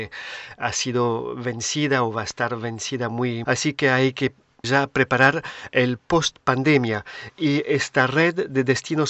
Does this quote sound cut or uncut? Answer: cut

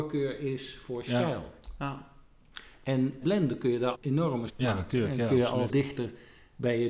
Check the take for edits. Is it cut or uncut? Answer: cut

